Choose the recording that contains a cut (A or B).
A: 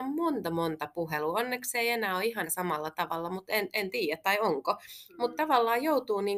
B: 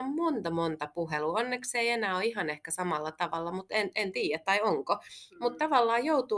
A